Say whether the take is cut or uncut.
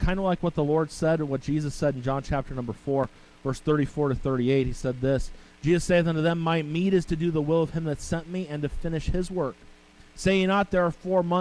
uncut